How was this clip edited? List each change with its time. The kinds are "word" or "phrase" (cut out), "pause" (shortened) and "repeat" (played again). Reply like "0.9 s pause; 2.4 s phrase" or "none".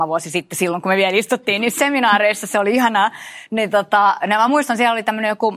none